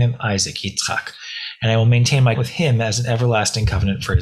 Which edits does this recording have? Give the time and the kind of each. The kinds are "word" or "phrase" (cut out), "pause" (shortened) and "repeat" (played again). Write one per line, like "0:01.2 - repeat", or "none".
0:02.3 - word

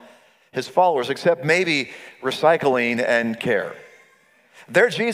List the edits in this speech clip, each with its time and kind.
0:03.4 - word

